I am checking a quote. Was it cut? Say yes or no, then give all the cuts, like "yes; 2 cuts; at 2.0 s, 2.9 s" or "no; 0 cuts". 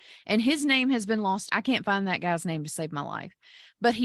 yes; 1 cut; at 1.5 s